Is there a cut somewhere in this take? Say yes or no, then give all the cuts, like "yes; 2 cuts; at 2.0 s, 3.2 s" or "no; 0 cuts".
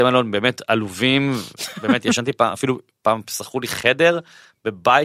no; 0 cuts